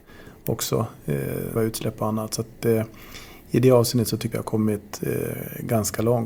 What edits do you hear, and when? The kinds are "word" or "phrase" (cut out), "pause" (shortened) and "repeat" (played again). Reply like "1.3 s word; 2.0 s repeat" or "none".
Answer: 1.6 s word; 4.3 s phrase